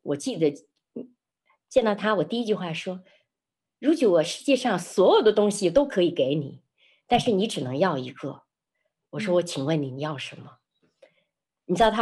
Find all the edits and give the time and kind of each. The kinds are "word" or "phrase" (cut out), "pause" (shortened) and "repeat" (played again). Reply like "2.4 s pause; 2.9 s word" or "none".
none